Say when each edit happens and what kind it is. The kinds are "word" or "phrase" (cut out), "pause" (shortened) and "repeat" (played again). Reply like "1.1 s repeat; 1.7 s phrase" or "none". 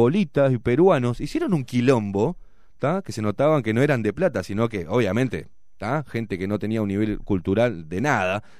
none